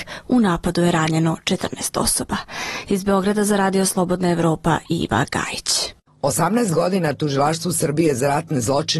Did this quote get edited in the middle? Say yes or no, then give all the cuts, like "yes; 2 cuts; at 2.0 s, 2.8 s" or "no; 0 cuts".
no; 0 cuts